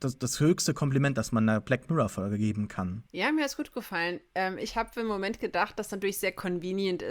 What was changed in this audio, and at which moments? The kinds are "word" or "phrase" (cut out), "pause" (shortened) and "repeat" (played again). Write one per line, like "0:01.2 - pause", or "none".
0:03.1 - pause